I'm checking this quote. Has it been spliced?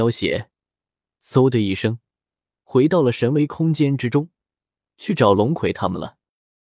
no; 0 cuts

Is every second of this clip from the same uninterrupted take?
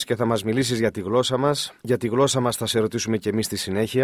no; 1 cut; at 1.8 s

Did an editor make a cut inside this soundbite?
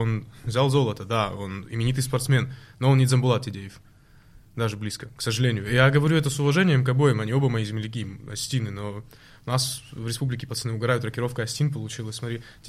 no; 0 cuts

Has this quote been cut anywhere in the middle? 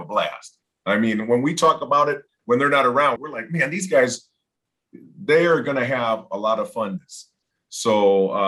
yes; 2 cuts; at 3.2 s, 7.0 s

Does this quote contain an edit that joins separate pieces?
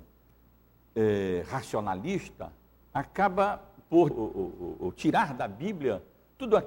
yes; 2 cuts; at 2.8 s, 4.1 s

